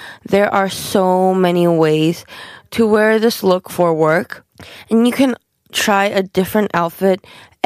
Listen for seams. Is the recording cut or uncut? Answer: uncut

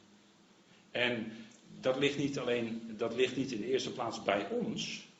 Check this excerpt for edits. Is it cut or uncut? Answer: uncut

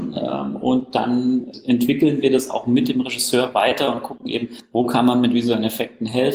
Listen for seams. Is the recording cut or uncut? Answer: uncut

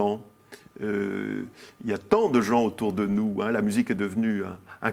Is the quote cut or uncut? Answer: uncut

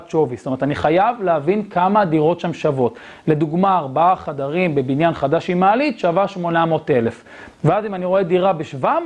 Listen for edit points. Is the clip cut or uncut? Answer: uncut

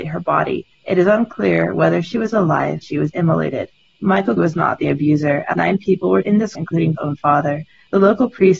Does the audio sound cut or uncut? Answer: cut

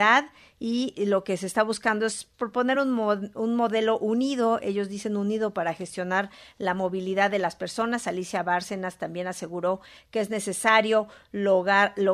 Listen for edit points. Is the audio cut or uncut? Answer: cut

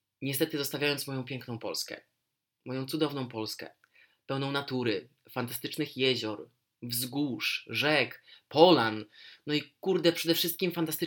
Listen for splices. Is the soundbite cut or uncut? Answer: uncut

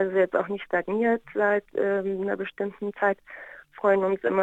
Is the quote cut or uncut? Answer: uncut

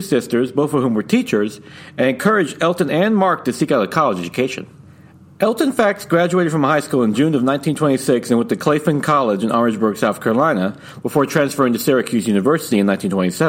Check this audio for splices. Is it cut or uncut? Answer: uncut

